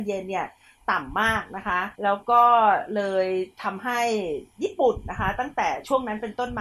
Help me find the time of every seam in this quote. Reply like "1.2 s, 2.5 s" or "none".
1.9 s

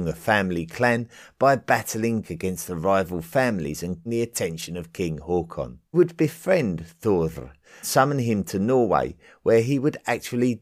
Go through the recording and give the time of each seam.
2.2 s, 4.1 s, 5.9 s, 7.8 s

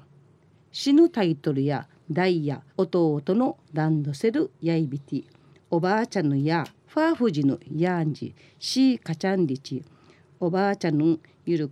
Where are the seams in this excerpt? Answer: 2.7 s, 3.6 s

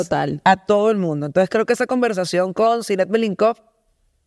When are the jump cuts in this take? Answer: none

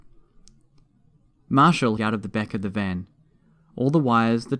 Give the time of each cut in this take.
2.0 s

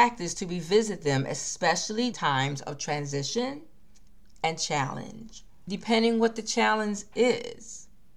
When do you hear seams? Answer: 2.1 s

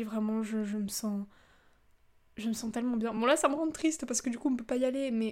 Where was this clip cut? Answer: none

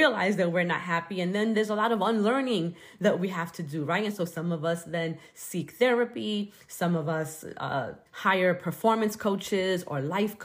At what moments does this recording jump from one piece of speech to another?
8.1 s

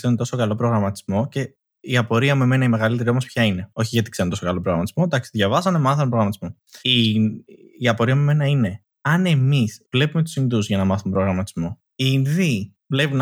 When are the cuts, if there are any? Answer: 6.8 s, 8.9 s

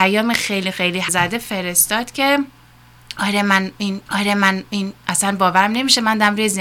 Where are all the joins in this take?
1.1 s, 4.1 s

